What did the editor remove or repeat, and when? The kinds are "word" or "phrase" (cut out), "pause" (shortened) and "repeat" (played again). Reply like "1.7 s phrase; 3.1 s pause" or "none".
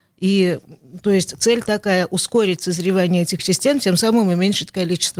3.4 s word